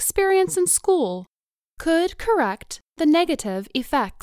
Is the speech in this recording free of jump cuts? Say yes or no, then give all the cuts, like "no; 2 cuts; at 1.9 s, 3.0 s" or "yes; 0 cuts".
yes; 0 cuts